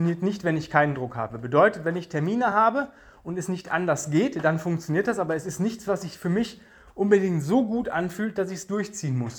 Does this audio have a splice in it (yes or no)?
no